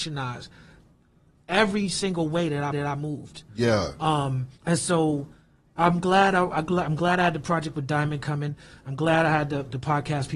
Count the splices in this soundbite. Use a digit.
2